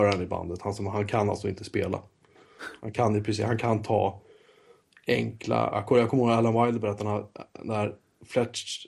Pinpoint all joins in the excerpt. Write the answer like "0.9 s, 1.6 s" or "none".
none